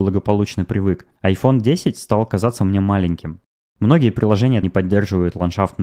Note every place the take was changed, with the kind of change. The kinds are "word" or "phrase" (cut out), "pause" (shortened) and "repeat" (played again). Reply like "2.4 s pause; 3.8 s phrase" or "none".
1.2 s pause; 4.6 s word

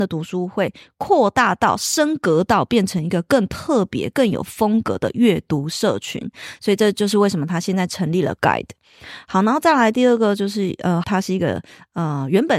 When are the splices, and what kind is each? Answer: 8.4 s word; 11.0 s word

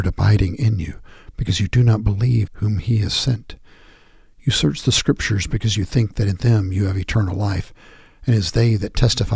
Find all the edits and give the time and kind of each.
2.5 s word

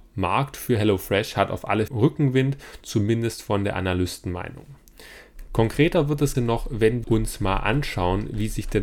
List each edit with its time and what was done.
1.9 s word; 6.3 s word; 7.0 s word

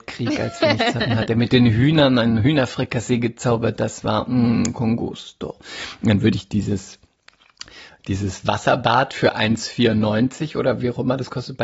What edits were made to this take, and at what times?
none

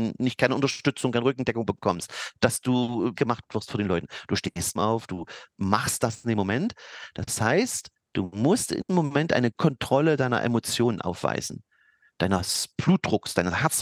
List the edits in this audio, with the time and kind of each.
3.2 s word; 4.8 s word; 8.9 s word; 9.5 s word

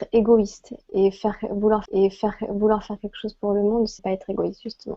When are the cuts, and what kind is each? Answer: 1.9 s repeat; 4.0 s word

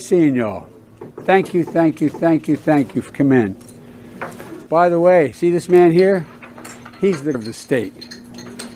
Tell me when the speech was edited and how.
1.1 s pause; 2.1 s repeat; 3.1 s word; 4.7 s pause; 5.3 s word; 7.3 s word

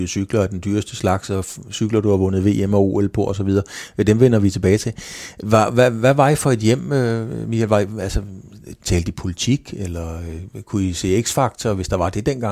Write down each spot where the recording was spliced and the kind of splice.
8.8 s pause

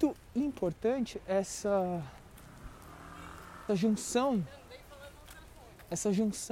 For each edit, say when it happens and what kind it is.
3.7 s word

